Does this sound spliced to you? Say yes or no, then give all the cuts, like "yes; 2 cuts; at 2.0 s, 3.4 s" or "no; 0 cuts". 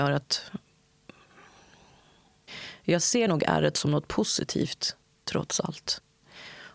no; 0 cuts